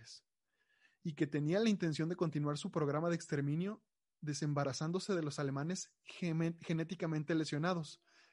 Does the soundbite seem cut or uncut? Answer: uncut